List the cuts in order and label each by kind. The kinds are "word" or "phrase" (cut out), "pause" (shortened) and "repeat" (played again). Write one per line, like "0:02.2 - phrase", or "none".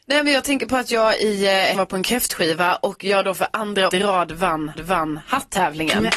0:01.7 - word
0:03.9 - word
0:04.7 - repeat